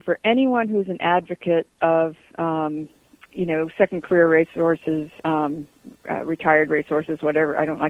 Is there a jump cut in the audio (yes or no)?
no